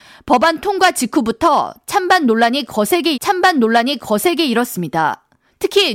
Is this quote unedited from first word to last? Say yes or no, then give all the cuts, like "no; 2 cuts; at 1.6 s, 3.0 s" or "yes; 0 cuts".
no; 1 cut; at 3.1 s